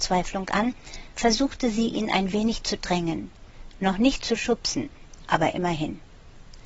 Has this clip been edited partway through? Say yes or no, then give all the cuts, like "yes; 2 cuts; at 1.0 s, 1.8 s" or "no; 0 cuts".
no; 0 cuts